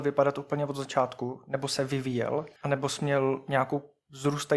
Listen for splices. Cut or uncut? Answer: cut